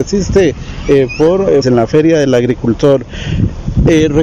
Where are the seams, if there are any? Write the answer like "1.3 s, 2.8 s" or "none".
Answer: 1.6 s